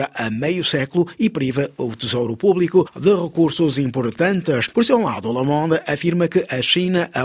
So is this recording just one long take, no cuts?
yes; 0 cuts

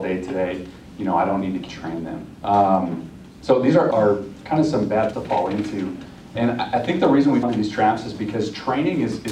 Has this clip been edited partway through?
yes; 5 cuts; at 1.7 s, 2.3 s, 3.9 s, 5.1 s, 7.4 s

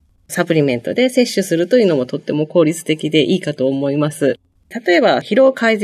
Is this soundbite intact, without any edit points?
no; 1 cut; at 4.5 s

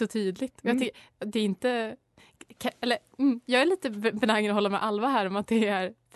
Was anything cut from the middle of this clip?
no; 0 cuts

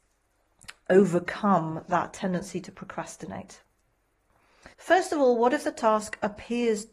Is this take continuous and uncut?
no; 1 cut; at 4.7 s

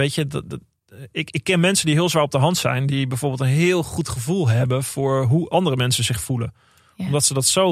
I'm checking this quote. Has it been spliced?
no; 0 cuts

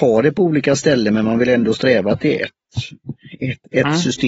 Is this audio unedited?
yes; 0 cuts

